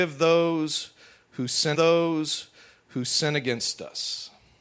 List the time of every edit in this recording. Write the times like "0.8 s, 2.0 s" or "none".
1.7 s